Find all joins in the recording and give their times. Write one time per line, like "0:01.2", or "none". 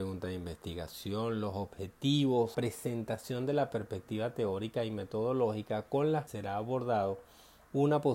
0:02.5
0:06.3